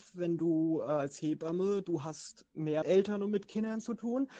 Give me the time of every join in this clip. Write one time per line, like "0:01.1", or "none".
0:02.8